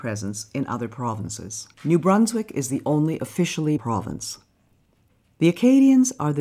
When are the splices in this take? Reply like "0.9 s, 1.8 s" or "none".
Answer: 1.7 s, 3.8 s